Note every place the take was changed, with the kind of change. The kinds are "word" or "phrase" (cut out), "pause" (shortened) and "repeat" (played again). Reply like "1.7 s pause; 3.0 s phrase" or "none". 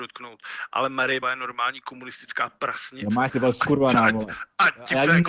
1.2 s word; 3.3 s word